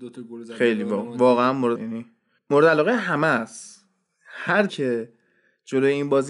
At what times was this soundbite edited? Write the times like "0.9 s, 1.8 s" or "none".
1.7 s, 4.7 s